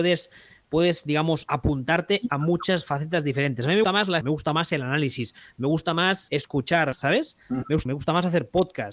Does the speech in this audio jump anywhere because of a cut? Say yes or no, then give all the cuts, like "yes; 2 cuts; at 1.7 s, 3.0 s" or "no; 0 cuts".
yes; 5 cuts; at 3.8 s, 4.2 s, 6.3 s, 6.9 s, 7.9 s